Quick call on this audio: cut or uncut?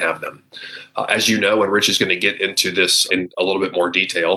cut